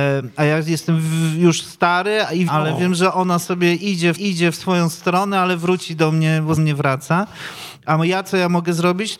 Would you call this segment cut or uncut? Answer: cut